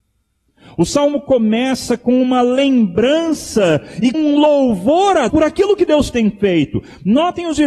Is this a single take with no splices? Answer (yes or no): no